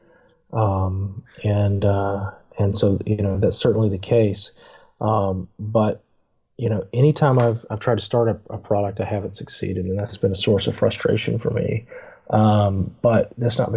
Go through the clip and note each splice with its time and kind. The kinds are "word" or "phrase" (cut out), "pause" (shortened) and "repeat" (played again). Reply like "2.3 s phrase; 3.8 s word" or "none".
none